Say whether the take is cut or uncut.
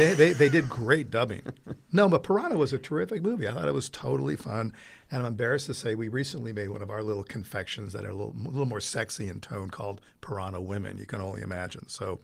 uncut